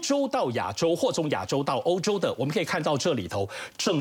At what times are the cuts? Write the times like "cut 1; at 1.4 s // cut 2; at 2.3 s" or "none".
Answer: none